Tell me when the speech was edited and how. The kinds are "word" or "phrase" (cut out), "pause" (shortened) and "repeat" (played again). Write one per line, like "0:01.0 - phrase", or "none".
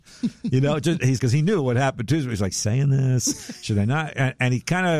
0:01.2 - word
0:02.5 - phrase